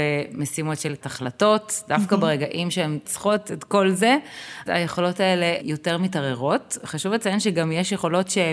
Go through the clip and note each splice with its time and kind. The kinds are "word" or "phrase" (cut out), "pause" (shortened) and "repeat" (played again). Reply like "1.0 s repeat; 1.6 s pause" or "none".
1.0 s word; 3.0 s word; 4.7 s word; 5.6 s word